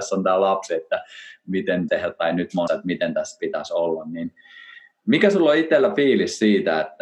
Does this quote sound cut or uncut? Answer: cut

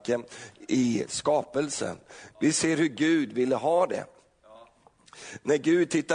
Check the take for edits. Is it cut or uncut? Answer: uncut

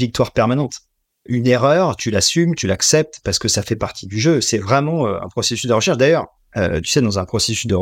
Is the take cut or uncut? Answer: uncut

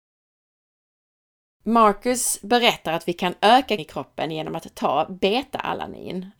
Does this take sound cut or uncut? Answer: cut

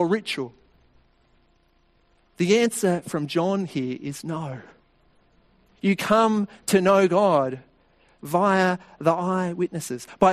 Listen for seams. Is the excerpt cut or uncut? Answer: uncut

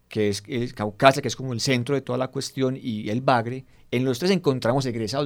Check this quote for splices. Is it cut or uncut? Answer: uncut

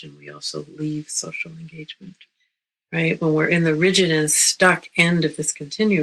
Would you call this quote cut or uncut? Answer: uncut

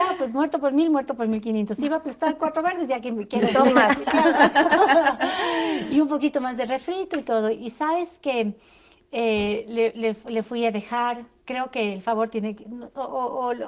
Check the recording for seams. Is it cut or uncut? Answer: uncut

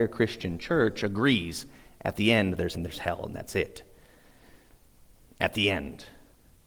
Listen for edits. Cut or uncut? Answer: cut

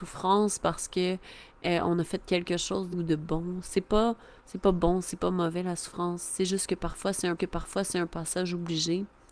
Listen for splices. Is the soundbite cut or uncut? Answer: cut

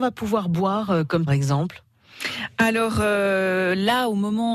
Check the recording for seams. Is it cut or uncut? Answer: cut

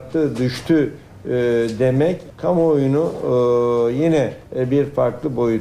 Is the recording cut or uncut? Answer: cut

